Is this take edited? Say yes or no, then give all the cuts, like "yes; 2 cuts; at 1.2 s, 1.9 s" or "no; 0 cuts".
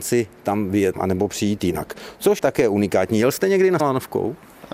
yes; 3 cuts; at 0.9 s, 2.4 s, 3.8 s